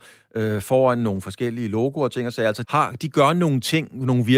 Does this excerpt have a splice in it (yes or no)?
yes